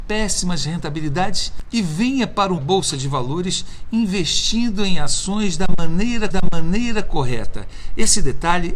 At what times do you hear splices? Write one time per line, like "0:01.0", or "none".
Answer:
0:02.6
0:06.3